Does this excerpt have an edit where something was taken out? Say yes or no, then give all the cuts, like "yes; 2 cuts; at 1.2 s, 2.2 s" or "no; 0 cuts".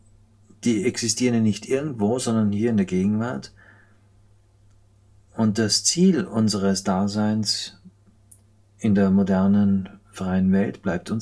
no; 0 cuts